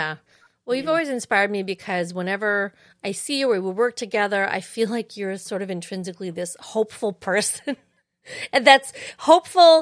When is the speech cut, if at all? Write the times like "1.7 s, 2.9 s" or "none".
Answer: 2.9 s